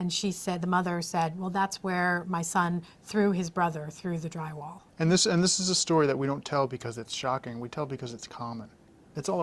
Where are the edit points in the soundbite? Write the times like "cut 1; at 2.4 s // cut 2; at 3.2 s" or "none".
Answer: cut 1; at 4.9 s